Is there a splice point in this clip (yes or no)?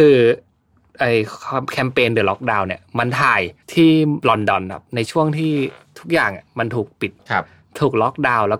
yes